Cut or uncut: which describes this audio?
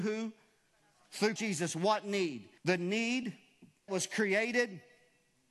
cut